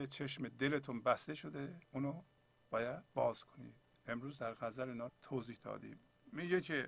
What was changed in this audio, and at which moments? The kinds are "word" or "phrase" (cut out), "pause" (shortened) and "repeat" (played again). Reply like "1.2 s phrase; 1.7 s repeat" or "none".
1.8 s pause; 3.1 s pause; 3.8 s pause; 5.1 s word